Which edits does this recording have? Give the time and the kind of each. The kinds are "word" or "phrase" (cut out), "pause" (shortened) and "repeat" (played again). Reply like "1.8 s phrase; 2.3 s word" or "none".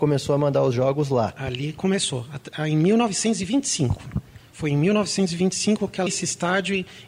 6.1 s word